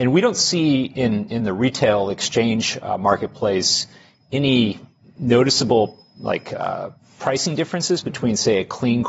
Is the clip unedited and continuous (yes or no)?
yes